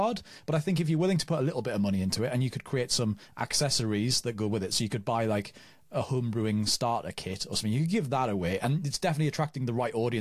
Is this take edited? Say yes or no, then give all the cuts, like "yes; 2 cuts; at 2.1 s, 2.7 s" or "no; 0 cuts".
no; 0 cuts